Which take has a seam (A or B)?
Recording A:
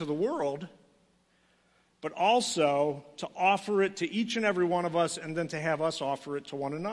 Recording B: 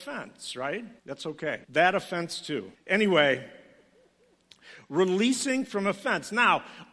B